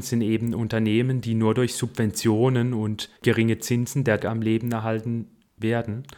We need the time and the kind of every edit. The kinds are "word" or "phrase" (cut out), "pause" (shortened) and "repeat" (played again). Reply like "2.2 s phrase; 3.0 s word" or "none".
3.2 s pause; 4.2 s word

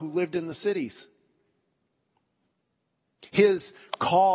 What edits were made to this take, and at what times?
none

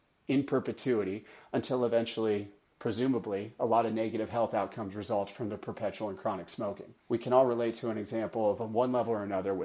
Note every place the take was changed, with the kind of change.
7.0 s pause

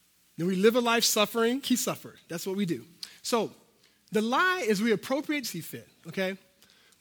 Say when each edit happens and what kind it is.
1.6 s word; 5.4 s phrase

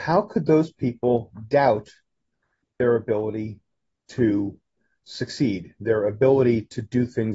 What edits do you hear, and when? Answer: none

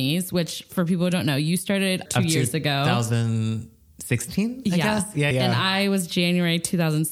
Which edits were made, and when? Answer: 2.1 s word; 5.3 s word

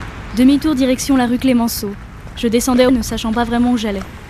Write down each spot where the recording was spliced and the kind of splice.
2.9 s phrase

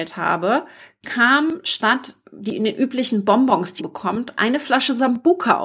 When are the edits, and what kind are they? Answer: 3.8 s phrase

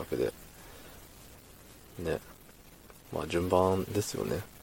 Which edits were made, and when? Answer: 3.0 s pause

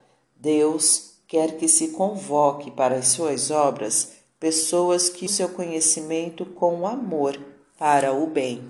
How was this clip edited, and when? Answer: 5.3 s word

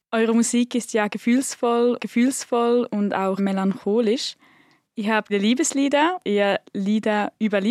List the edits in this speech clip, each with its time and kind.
2.0 s repeat; 3.4 s word; 5.3 s word; 6.2 s word

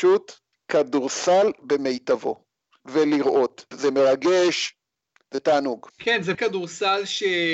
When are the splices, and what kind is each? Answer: 2.8 s word; 3.7 s word; 5.9 s pause; 6.3 s word

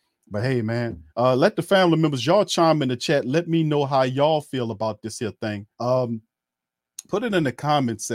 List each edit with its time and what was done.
1.1 s pause; 5.7 s pause

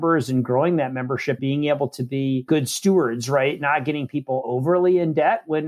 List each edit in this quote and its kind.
1.4 s word

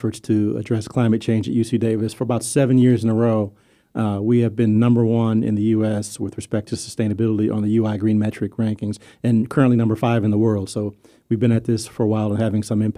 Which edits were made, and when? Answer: none

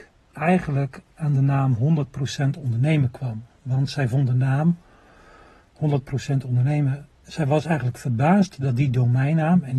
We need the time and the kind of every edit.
none

